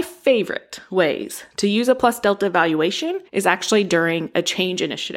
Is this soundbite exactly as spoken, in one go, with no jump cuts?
no; 1 cut; at 3.3 s

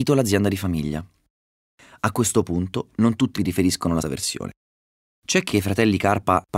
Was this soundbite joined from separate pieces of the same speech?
yes; 3 cuts; at 3.4 s, 4.0 s, 5.5 s

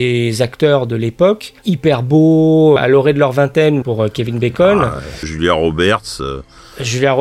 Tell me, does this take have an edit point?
yes; 4 cuts; at 1.6 s, 2.8 s, 3.8 s, 5.2 s

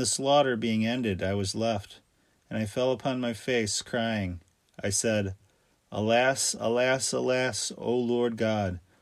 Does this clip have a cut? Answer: no; 0 cuts

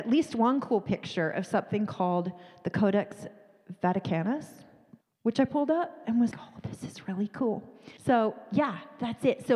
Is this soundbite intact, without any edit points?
no; 3 cuts; at 5.0 s, 6.3 s, 8.0 s

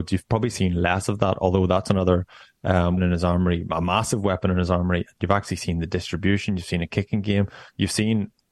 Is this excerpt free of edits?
no; 1 cut; at 3.0 s

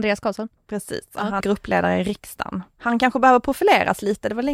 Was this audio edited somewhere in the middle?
yes; 1 cut; at 1.4 s

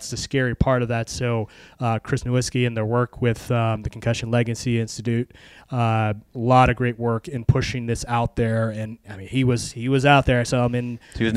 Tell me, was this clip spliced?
no; 0 cuts

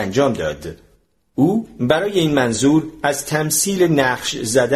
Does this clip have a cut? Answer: no; 0 cuts

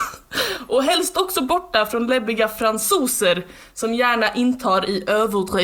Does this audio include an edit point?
no; 0 cuts

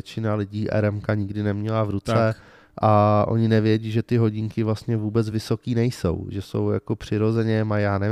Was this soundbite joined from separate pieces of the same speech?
no; 0 cuts

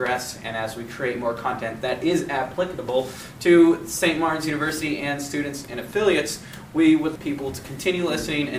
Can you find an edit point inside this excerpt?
yes; 1 cut; at 7.2 s

